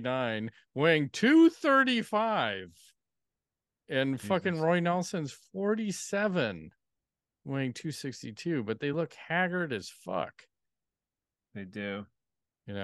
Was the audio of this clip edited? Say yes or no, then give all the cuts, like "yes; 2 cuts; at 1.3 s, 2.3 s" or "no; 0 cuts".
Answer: no; 0 cuts